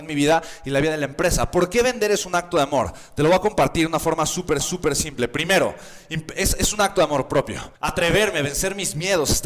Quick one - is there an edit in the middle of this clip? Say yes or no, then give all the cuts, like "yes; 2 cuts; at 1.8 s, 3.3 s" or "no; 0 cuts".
yes; 2 cuts; at 4.6 s, 7.8 s